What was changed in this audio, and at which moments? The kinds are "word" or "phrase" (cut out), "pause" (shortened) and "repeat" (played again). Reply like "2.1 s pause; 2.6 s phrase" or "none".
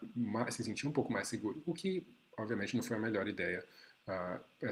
none